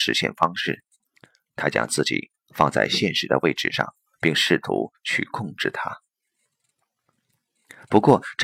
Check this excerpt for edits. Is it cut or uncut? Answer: uncut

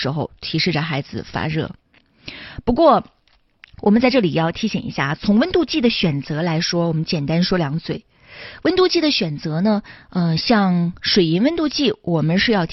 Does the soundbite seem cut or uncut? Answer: uncut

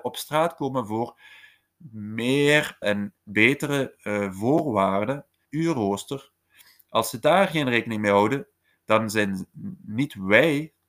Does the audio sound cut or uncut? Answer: cut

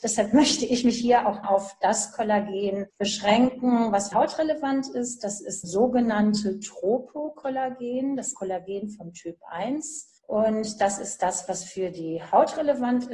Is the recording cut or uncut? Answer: cut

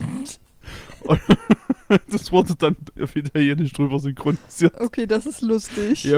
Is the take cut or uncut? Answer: uncut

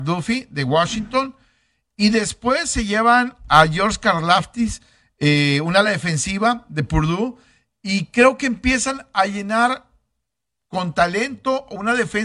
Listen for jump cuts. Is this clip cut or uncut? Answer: uncut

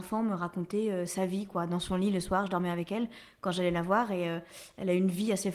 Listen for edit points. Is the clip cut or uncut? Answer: uncut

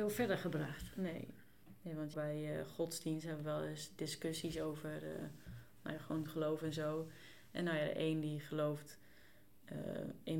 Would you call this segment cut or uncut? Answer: cut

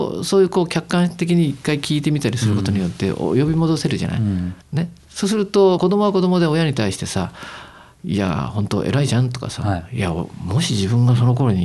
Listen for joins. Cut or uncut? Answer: cut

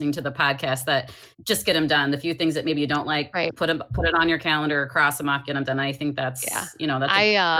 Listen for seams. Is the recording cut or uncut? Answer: cut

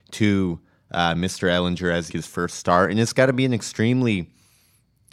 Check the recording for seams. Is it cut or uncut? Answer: cut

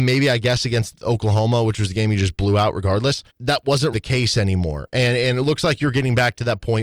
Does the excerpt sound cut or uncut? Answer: cut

